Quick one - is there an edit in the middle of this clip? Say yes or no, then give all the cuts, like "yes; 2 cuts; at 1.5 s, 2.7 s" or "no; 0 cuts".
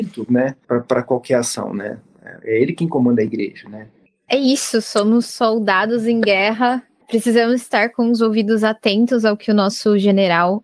no; 0 cuts